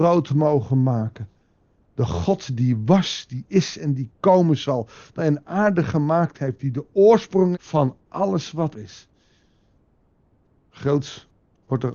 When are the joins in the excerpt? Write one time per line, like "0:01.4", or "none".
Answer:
0:05.2
0:07.5
0:08.7